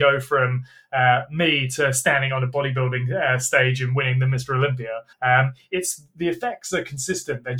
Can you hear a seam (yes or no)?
yes